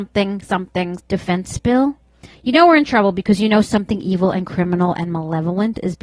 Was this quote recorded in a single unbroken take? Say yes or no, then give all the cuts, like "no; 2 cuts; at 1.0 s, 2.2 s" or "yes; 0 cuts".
no; 1 cut; at 1.0 s